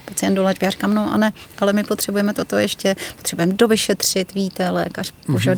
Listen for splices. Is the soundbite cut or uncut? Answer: uncut